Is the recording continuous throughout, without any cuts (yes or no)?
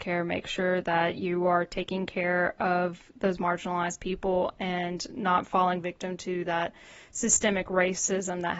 yes